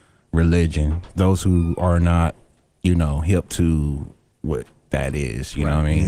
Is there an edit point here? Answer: no; 0 cuts

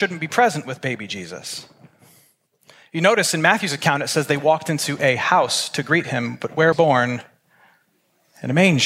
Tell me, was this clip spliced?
yes; 1 cut; at 6.7 s

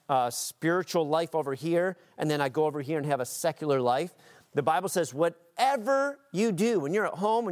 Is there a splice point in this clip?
no; 0 cuts

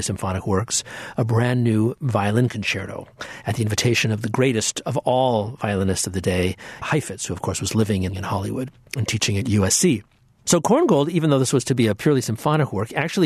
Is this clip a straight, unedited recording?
no; 2 cuts; at 6.8 s, 8.1 s

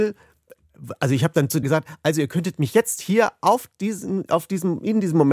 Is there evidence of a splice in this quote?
yes; 1 cut; at 1.6 s

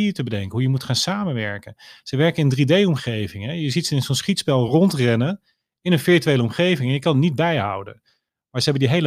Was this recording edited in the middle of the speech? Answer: no; 0 cuts

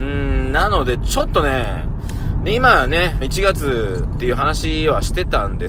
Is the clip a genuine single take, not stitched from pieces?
no; 1 cut; at 3.2 s

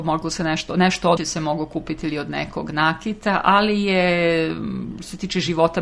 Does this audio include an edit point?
yes; 1 cut; at 1.2 s

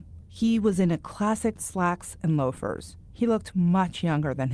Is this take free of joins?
no; 1 cut; at 1.5 s

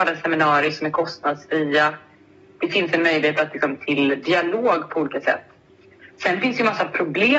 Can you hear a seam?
no; 0 cuts

